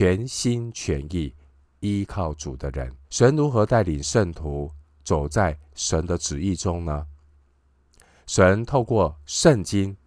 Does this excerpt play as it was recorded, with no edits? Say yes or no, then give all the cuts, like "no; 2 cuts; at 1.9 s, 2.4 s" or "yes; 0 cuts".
no; 1 cut; at 3.0 s